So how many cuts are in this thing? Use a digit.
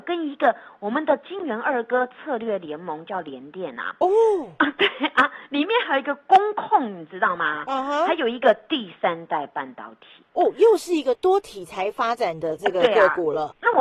1